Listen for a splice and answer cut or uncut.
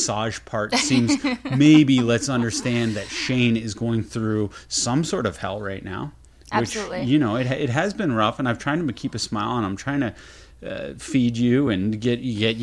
uncut